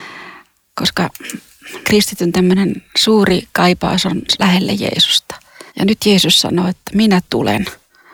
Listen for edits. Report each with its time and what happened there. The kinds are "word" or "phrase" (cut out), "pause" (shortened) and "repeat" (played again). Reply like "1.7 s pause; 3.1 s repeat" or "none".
1.8 s word; 4.4 s word; 5.7 s pause